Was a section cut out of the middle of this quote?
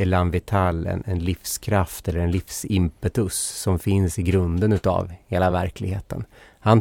no; 0 cuts

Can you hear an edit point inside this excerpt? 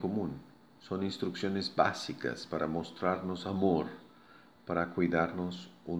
no; 0 cuts

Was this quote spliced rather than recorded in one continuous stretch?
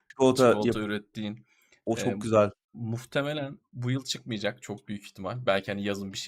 no; 0 cuts

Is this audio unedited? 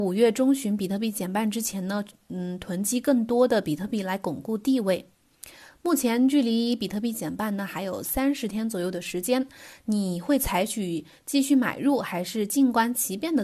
yes; 0 cuts

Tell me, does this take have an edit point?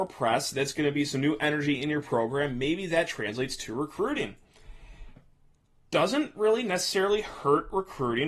no; 0 cuts

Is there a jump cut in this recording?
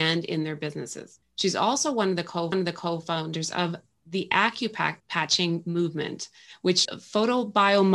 yes; 4 cuts; at 1.2 s, 2.5 s, 5.0 s, 6.8 s

